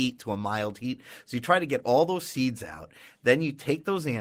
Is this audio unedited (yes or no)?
yes